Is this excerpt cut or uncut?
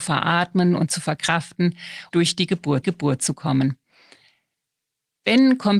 cut